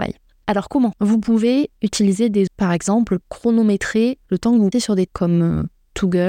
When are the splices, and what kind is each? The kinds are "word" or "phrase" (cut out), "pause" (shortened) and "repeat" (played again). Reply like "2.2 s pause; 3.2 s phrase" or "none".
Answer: 0.9 s word; 2.5 s word; 3.2 s word; 4.7 s word; 5.1 s word